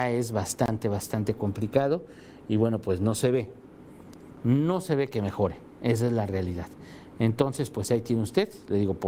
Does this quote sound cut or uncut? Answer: uncut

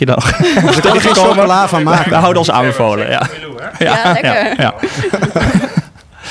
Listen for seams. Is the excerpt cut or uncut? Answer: uncut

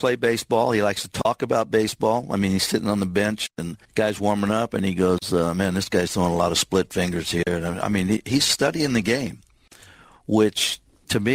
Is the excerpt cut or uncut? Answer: cut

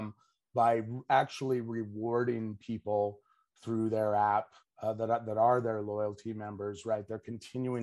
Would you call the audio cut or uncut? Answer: uncut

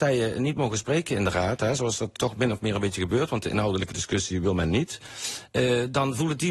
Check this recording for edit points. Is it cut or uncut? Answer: cut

